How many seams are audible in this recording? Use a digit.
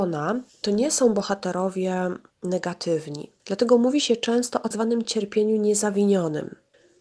2